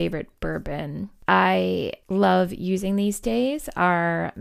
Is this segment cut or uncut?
cut